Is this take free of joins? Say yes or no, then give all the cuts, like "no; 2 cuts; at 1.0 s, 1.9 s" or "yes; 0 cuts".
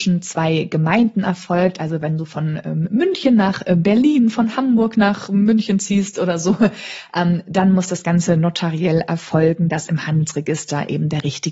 yes; 0 cuts